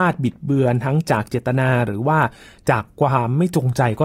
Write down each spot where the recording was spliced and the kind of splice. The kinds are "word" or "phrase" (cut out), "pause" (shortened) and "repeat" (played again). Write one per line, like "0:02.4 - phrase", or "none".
none

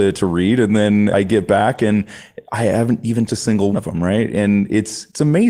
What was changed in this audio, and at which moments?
0:01.1 - word
0:03.3 - word
0:03.7 - word

